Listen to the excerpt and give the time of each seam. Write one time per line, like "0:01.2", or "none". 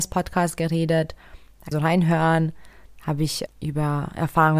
0:01.7
0:03.5